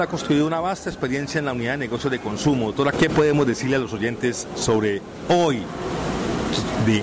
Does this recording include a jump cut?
yes; 1 cut; at 2.9 s

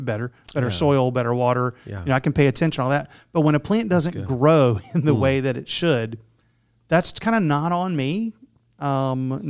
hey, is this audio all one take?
yes; 0 cuts

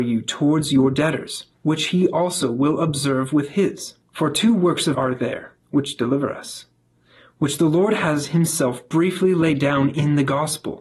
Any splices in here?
yes; 4 cuts; at 1.5 s, 4.0 s, 4.9 s, 5.6 s

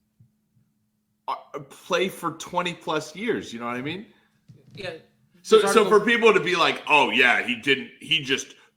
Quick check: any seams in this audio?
no; 0 cuts

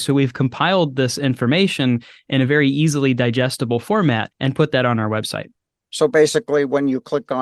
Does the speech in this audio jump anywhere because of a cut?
no; 0 cuts

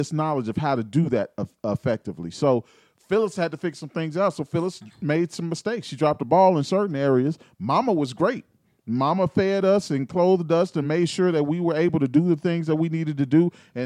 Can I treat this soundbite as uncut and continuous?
yes; 0 cuts

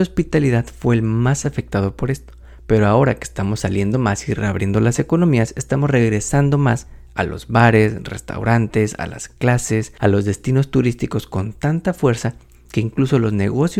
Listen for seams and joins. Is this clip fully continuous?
yes; 0 cuts

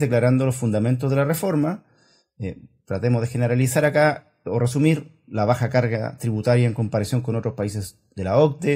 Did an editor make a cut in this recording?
no; 0 cuts

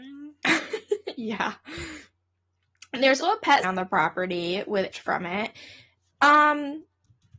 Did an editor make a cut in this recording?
yes; 3 cuts; at 3.2 s, 3.6 s, 4.9 s

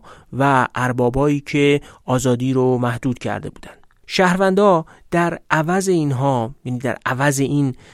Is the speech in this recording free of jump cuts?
yes; 0 cuts

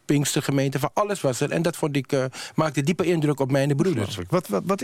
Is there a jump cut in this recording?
no; 0 cuts

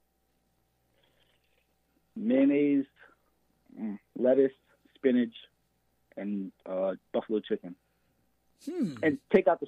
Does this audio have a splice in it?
no; 0 cuts

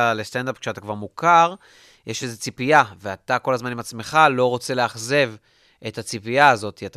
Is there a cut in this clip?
no; 0 cuts

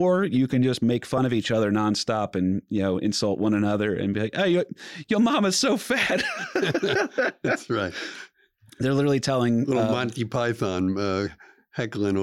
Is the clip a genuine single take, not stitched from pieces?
yes; 0 cuts

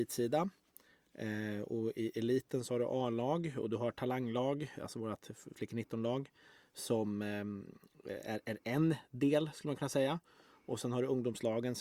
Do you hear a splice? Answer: no; 0 cuts

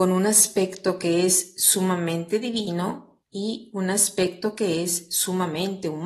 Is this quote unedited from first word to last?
no; 1 cut; at 3.2 s

